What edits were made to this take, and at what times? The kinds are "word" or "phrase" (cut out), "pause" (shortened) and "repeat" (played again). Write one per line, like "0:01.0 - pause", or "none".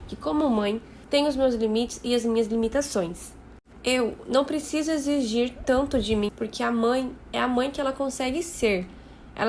0:01.0 - pause
0:06.3 - word